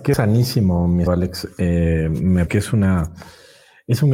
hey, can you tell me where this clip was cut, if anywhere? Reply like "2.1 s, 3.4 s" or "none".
1.1 s, 2.5 s